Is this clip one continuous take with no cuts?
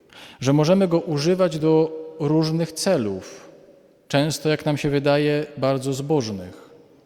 yes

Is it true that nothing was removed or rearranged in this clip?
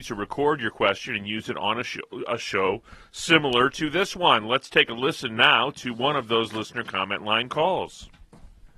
yes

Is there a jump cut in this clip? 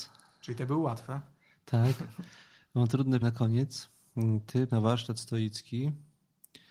yes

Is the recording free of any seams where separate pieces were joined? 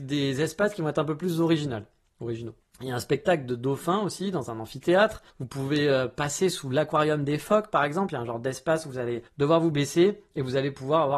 no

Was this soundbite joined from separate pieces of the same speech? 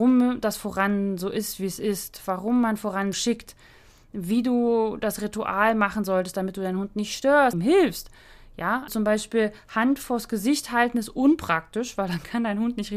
yes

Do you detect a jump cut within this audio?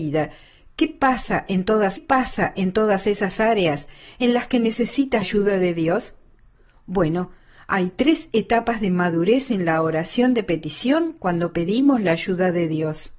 yes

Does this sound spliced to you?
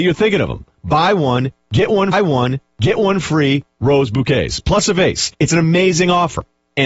yes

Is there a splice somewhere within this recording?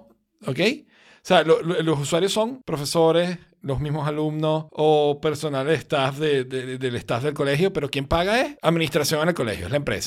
no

